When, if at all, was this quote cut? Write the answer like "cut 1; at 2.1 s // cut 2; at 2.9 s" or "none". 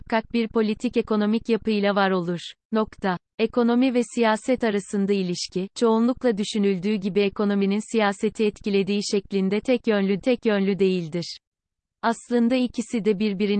cut 1; at 2.6 s // cut 2; at 10.2 s